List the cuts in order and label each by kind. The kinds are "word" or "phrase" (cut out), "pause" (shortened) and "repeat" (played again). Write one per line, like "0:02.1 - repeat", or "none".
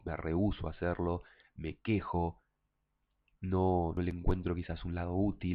none